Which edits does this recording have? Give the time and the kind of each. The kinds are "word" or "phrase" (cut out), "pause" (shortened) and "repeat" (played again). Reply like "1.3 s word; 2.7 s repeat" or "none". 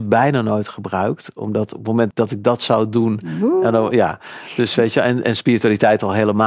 2.1 s word